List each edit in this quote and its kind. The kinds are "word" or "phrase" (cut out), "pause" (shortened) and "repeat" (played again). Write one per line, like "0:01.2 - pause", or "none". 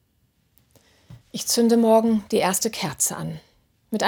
0:01.2 - pause

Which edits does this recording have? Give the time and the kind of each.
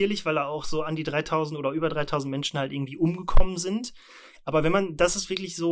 none

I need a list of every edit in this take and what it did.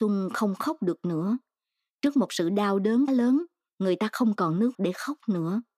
0:03.1 - word
0:04.7 - word

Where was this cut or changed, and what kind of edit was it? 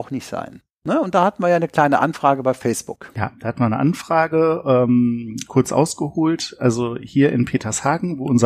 none

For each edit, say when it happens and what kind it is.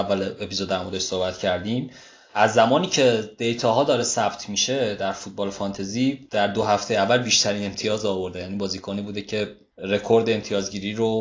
none

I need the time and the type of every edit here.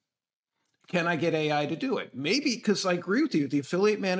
none

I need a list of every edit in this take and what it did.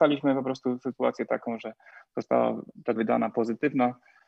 0:03.0 - word

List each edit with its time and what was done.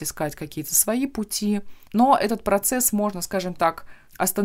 none

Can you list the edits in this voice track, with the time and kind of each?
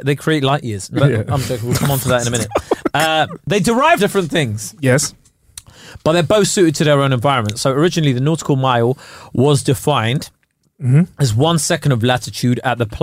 0:01.0 - word
0:04.0 - word

